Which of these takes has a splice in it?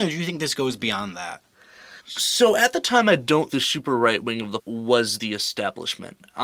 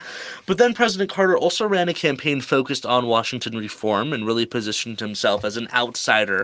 first; 3 cuts; at 2.0 s, 3.5 s, 4.6 s

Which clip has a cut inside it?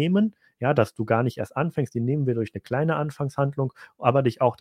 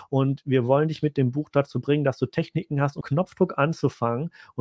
second; 1 cut; at 3.0 s

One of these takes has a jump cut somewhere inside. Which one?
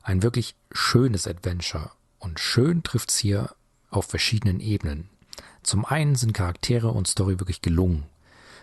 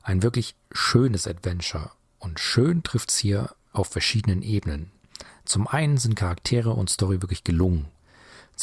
second; 1 cut; at 3.6 s

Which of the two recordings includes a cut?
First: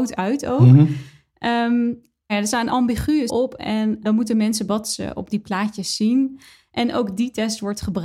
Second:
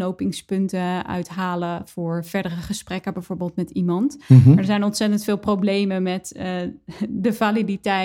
first; 5 cuts; at 2.3 s, 2.7 s, 3.3 s, 4.0 s, 4.7 s

